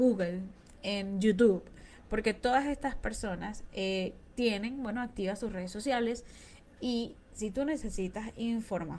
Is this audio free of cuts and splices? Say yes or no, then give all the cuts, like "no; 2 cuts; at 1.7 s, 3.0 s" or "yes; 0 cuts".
yes; 0 cuts